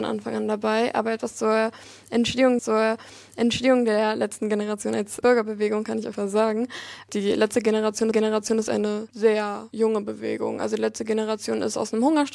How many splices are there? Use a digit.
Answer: 4